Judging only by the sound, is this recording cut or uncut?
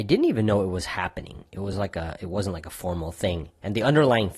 uncut